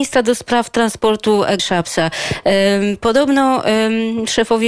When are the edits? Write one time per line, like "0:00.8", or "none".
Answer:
0:01.6